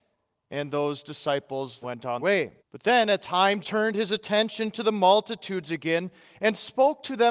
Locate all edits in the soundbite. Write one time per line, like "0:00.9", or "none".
0:01.8
0:02.2
0:02.6
0:03.2
0:03.6